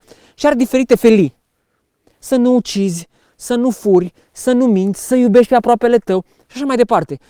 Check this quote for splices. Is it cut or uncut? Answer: uncut